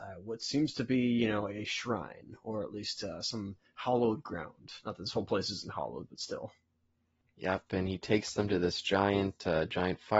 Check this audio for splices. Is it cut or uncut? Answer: uncut